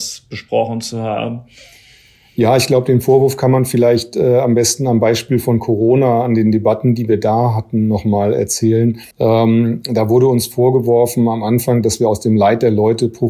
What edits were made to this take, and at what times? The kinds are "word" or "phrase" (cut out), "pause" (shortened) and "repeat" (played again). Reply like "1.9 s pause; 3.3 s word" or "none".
9.1 s pause